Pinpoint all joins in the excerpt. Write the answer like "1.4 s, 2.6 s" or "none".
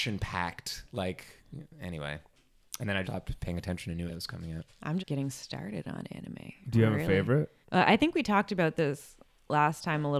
3.0 s, 4.1 s, 5.0 s, 7.6 s